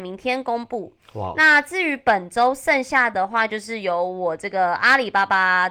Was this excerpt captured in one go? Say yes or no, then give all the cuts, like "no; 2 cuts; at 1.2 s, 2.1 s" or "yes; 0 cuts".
yes; 0 cuts